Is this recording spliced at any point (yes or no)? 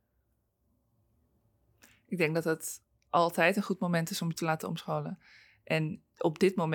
no